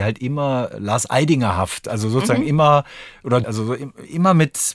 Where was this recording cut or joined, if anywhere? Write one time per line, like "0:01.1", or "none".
0:03.4